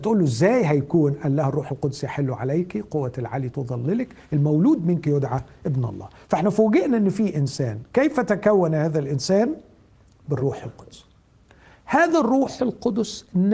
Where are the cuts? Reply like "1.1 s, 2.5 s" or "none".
none